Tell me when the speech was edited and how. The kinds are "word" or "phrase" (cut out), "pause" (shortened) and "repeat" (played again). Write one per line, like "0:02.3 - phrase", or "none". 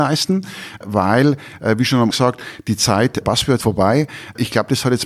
0:02.1 - word
0:03.2 - word
0:03.6 - word